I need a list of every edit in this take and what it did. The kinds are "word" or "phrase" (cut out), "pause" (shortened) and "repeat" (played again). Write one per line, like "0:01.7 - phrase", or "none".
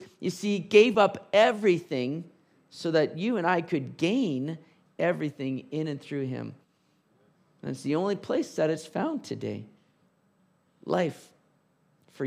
none